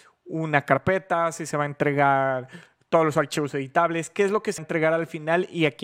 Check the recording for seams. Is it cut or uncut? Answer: cut